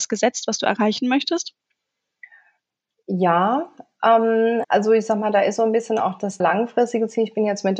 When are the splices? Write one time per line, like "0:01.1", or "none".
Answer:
0:04.6
0:06.4